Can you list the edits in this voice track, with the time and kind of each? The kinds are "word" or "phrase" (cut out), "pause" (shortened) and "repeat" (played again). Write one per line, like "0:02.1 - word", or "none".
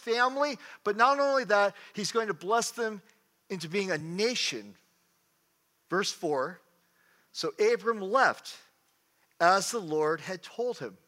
none